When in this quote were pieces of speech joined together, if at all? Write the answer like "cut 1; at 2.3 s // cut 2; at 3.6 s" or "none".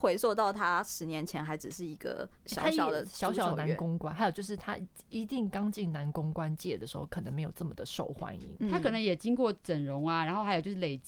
cut 1; at 2.3 s